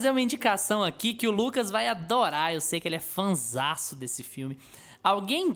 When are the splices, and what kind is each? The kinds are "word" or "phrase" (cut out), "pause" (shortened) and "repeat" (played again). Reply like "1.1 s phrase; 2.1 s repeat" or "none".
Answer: none